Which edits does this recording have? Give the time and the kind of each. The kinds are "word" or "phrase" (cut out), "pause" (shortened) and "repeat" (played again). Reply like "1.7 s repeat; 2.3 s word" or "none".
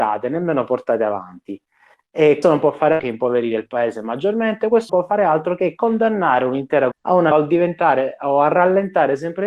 2.4 s word; 3.0 s word; 4.9 s word; 6.9 s word; 7.3 s word